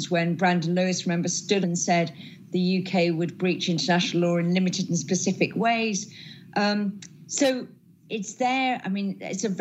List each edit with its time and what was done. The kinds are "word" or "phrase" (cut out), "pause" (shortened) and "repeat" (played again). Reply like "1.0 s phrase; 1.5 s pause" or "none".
1.6 s word

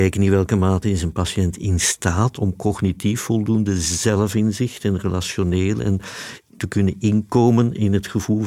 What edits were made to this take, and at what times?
none

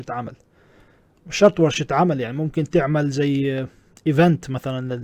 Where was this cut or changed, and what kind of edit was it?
none

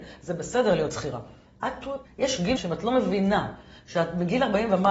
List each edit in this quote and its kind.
2.0 s word; 2.6 s word

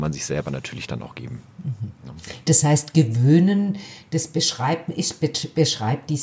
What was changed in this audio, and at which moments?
none

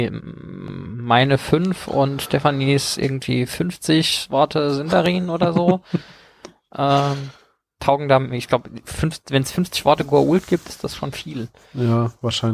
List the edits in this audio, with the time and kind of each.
none

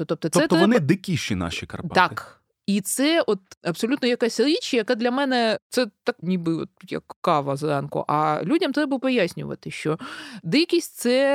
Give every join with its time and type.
6.2 s word

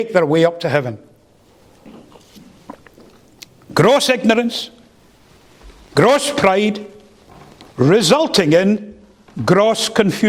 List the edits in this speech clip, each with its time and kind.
none

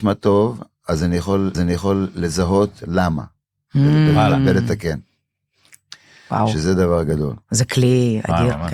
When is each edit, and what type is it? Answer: 1.5 s repeat

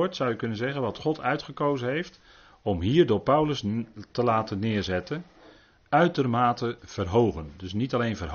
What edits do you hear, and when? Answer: none

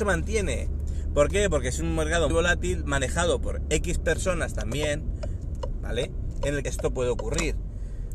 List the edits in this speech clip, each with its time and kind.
2.3 s word; 6.6 s phrase

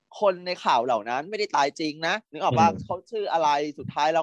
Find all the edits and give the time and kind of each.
2.3 s pause

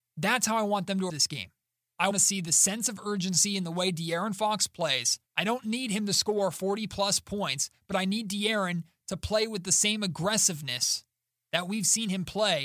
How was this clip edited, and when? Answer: 1.1 s word; 2.1 s word; 5.3 s pause

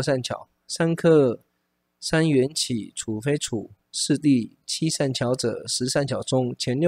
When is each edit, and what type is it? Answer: none

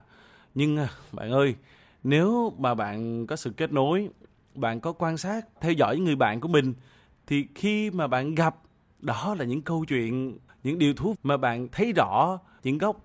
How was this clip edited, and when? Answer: 5.6 s word; 11.1 s word

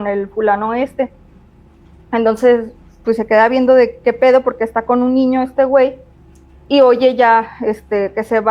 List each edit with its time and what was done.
none

